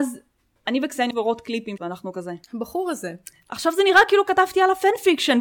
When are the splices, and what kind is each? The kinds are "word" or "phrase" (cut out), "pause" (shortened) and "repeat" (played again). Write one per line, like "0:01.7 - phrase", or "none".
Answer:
0:01.1 - word
0:01.8 - phrase
0:02.4 - pause